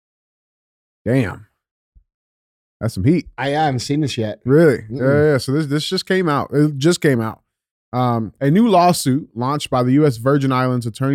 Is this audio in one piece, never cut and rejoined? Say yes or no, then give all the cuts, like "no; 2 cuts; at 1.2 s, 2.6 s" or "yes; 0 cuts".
yes; 0 cuts